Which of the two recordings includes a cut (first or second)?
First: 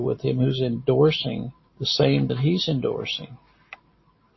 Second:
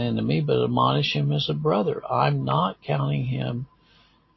first